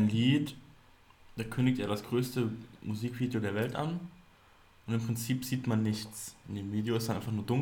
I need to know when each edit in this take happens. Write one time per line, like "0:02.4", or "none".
none